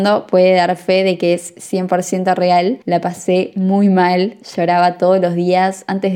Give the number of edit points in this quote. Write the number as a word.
one